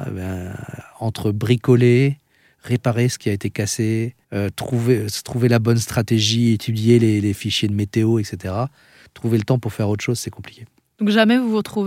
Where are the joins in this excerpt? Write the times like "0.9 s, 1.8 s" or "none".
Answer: 4.2 s